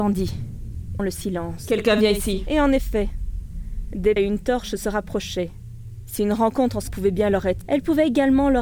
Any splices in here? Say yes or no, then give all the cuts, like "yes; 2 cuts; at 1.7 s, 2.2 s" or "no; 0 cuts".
yes; 4 cuts; at 1.0 s, 4.2 s, 6.9 s, 7.6 s